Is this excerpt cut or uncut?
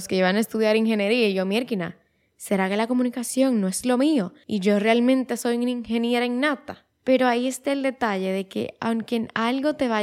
uncut